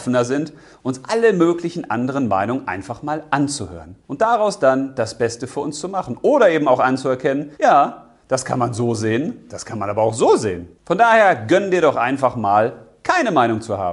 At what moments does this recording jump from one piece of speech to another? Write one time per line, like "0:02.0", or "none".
0:04.0
0:07.5
0:10.7